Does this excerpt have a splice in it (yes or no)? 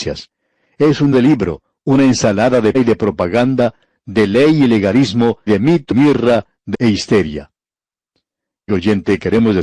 yes